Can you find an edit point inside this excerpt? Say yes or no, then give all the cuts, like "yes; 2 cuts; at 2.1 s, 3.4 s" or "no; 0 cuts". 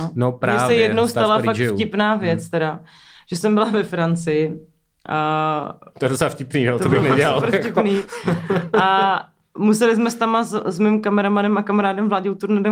no; 0 cuts